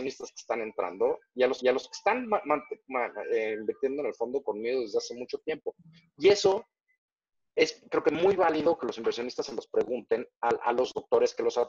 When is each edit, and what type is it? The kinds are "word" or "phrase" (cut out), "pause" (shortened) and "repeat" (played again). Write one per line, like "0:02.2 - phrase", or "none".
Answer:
0:01.6 - repeat